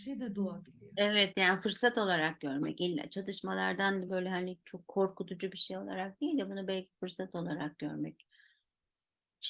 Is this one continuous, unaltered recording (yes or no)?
yes